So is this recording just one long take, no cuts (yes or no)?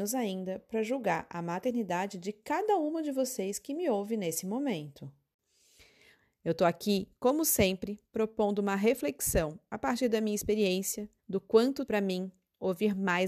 no